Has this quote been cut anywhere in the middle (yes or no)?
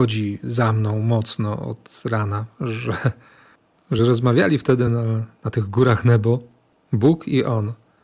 no